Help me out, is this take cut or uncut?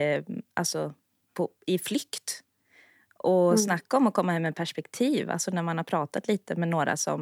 uncut